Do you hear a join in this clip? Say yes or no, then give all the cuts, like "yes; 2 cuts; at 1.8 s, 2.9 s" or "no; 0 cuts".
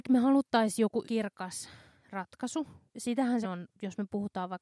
yes; 3 cuts; at 1.0 s, 2.9 s, 3.4 s